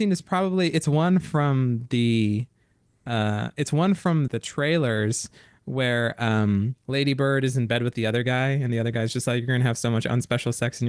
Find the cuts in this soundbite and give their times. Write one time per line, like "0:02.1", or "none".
0:04.3
0:06.8